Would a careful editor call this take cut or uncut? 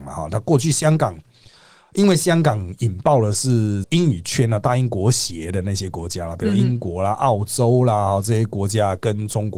uncut